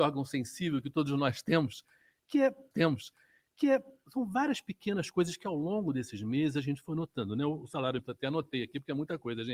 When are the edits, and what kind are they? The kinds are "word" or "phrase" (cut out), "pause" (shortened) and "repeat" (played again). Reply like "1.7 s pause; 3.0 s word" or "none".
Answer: 2.7 s repeat; 8.0 s word